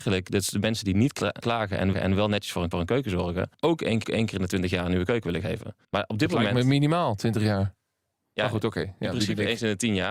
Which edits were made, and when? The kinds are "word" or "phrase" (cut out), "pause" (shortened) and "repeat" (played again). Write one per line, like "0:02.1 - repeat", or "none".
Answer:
0:01.4 - word
0:01.9 - repeat
0:02.7 - repeat
0:03.5 - pause
0:04.0 - repeat
0:05.8 - pause